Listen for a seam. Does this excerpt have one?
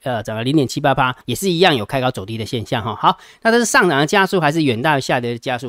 yes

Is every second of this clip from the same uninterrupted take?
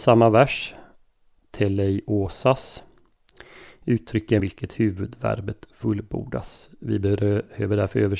no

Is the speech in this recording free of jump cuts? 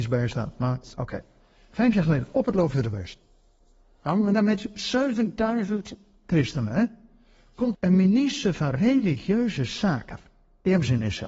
no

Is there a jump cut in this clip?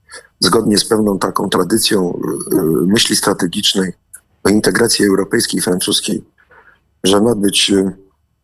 no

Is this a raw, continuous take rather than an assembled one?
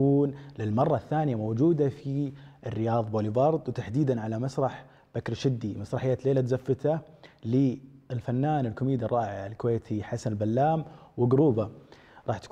yes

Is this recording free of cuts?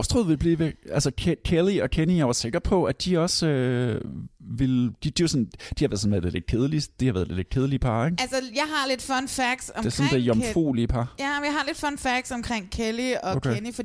yes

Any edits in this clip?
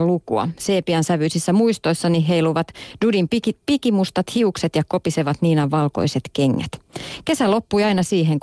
no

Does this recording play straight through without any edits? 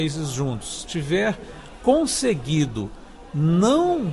yes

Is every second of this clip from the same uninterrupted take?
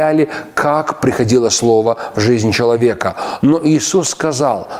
yes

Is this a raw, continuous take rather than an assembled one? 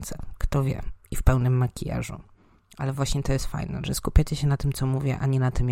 yes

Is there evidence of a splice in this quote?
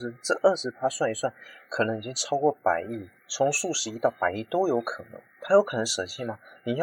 yes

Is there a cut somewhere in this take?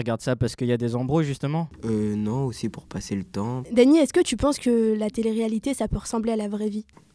no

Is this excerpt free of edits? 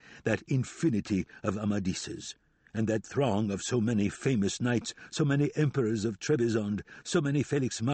yes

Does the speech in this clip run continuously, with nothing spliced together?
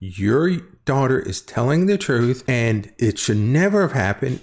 yes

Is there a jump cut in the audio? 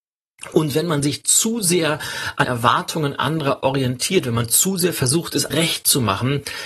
yes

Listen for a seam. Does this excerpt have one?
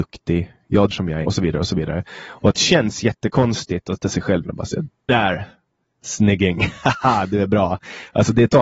yes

